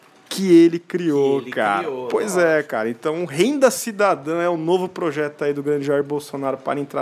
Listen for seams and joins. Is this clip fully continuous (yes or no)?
yes